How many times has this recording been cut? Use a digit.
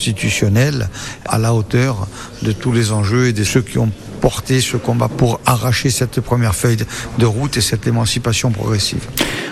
3